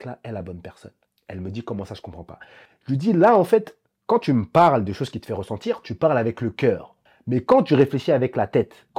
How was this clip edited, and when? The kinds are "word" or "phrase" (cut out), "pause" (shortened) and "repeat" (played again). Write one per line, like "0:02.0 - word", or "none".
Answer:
none